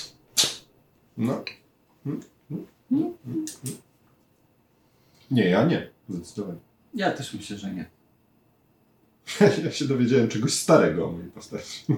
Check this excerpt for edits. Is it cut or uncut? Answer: uncut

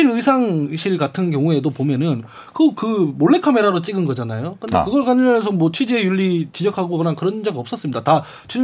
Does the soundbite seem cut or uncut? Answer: uncut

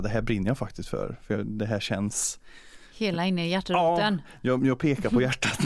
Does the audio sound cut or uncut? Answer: uncut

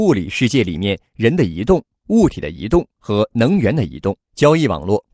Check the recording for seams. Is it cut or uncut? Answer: cut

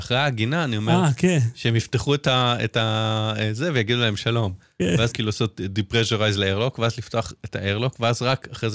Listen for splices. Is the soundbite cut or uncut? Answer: cut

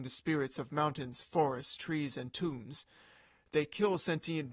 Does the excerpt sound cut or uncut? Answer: uncut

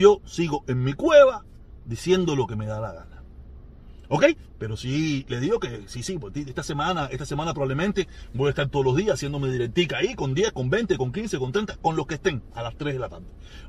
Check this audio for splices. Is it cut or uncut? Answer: uncut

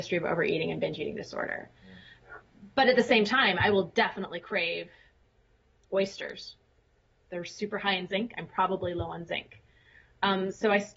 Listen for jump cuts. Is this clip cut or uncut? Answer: uncut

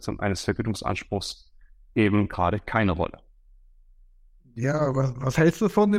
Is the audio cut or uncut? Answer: uncut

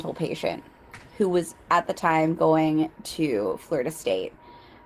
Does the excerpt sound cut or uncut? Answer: uncut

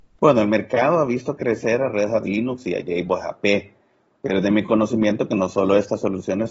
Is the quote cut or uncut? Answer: uncut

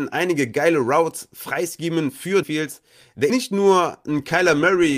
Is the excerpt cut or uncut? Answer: cut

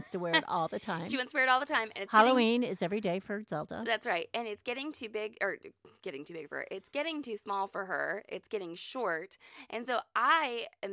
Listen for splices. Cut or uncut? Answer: uncut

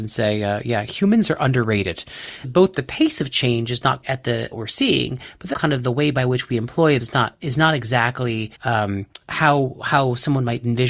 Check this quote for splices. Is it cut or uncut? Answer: cut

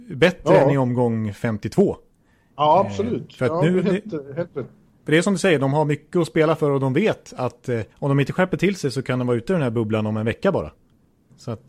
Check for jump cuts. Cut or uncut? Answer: cut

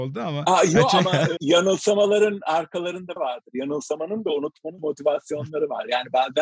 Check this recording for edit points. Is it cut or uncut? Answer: cut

